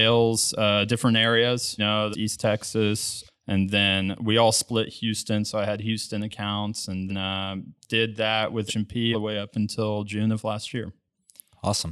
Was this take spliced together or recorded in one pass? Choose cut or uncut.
cut